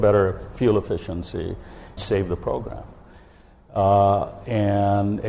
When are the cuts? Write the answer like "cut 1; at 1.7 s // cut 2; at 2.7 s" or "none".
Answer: cut 1; at 2.0 s